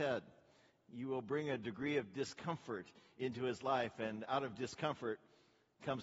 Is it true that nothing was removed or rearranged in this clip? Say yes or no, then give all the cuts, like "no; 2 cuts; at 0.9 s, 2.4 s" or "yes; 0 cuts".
yes; 0 cuts